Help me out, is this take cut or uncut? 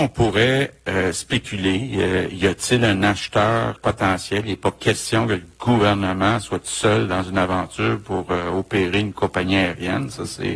cut